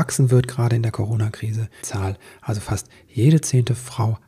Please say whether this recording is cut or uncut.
cut